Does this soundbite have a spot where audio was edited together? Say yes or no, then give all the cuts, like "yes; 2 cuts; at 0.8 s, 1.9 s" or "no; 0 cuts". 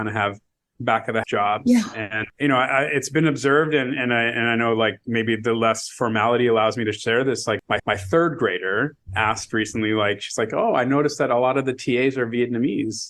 yes; 3 cuts; at 1.2 s, 7.8 s, 9.0 s